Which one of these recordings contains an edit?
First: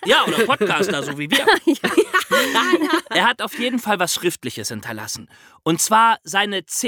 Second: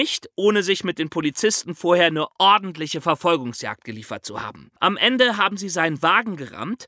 second; 1 cut; at 4.8 s

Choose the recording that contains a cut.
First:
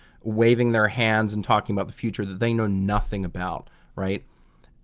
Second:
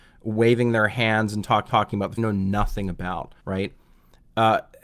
second; 3 cuts; at 1.7 s, 2.2 s, 3.4 s

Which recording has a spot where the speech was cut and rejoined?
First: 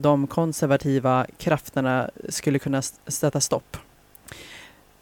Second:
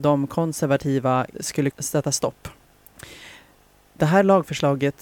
second; 2 cuts; at 1.3 s, 1.7 s

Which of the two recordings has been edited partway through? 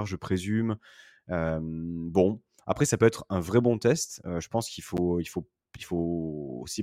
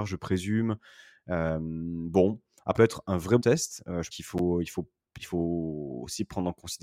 second; 3 cuts; at 2.8 s, 3.4 s, 4.1 s

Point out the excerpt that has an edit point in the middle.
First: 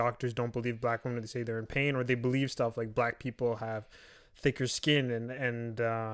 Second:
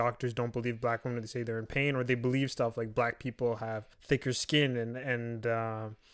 second; 1 cut; at 3.9 s

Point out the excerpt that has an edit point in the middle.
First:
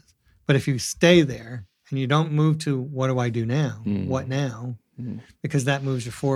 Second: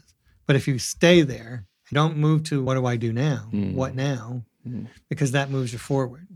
second; 2 cuts; at 1.9 s, 2.7 s

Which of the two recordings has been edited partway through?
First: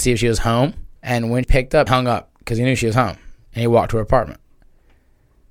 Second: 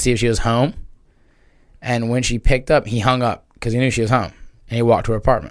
first; 3 cuts; at 1.0 s, 1.4 s, 1.9 s

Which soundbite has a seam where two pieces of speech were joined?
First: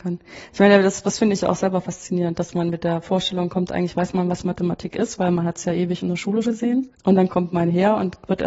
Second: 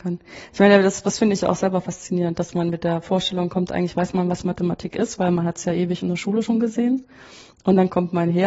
first; 2 cuts; at 6.4 s, 6.9 s

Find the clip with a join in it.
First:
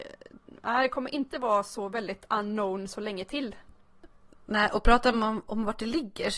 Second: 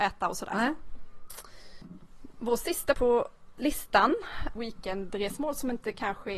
second; 2 cuts; at 2.9 s, 4.6 s

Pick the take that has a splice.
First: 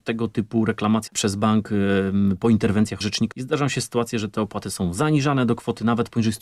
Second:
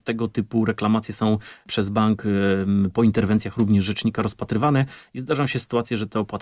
first; 3 cuts; at 1.1 s, 3.0 s, 3.3 s

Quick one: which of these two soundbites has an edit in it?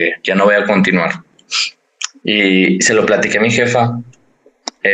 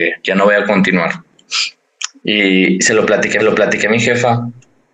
second; 1 cut; at 3.4 s

